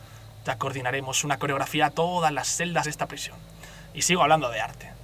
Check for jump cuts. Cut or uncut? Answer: cut